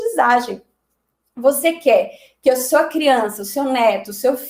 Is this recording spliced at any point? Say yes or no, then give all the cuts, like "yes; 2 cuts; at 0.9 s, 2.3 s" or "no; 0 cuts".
no; 0 cuts